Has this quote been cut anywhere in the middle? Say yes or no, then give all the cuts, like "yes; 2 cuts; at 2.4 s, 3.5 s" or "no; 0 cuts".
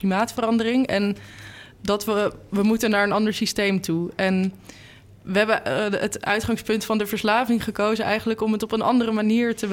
no; 0 cuts